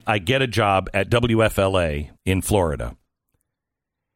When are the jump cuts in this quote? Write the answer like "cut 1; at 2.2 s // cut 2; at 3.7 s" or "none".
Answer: cut 1; at 2.2 s